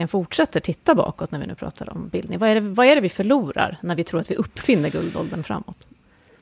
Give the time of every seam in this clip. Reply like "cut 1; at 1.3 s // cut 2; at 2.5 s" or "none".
none